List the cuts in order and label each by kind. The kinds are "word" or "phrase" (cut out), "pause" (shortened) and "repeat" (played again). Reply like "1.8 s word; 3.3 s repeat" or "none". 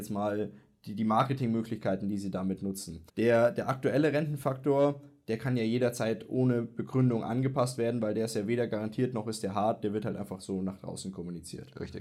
3.1 s pause